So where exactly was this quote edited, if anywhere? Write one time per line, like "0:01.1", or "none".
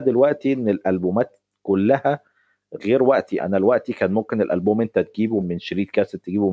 0:03.4
0:05.4